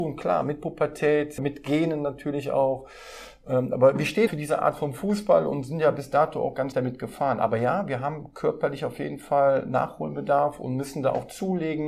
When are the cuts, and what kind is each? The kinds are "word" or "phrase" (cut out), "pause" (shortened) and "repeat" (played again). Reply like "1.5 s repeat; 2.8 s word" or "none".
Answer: 1.4 s word; 4.3 s word; 6.7 s word